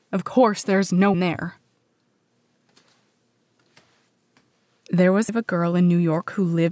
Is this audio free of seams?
no; 2 cuts; at 1.1 s, 5.3 s

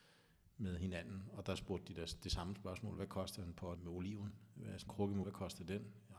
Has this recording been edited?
yes; 3 cuts; at 3.8 s, 4.9 s, 5.2 s

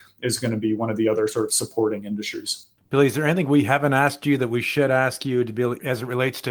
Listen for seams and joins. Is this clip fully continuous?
yes; 0 cuts

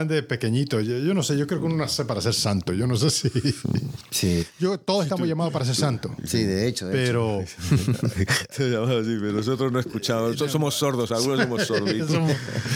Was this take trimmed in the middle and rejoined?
no; 0 cuts

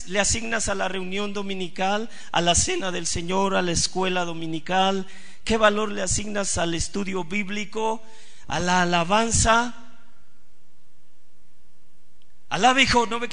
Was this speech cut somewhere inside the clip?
no; 0 cuts

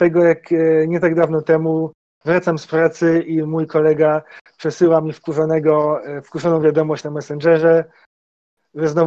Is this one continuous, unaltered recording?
yes; 0 cuts

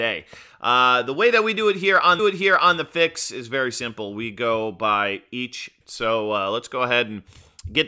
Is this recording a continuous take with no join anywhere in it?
no; 2 cuts; at 2.2 s, 5.8 s

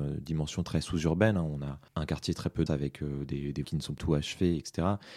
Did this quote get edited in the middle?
yes; 4 cuts; at 1.9 s, 2.7 s, 3.6 s, 4.0 s

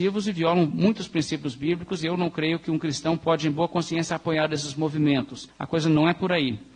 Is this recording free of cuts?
yes; 0 cuts

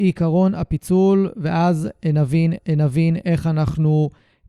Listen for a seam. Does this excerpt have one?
yes; 1 cut; at 2.6 s

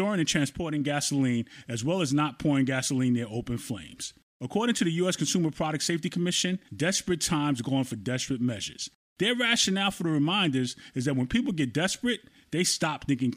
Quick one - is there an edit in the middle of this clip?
no; 0 cuts

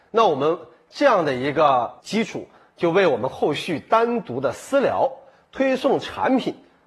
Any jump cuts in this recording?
yes; 1 cut; at 2.0 s

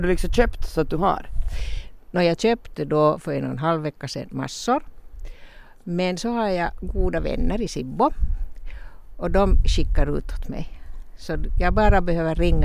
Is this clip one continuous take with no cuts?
yes; 0 cuts

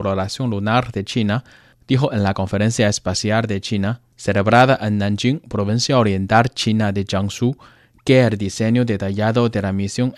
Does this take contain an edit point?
no; 0 cuts

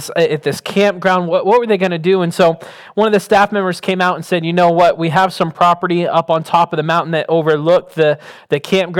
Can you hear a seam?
no; 0 cuts

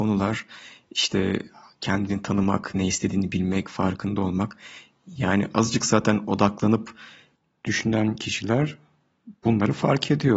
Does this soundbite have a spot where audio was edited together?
no; 0 cuts

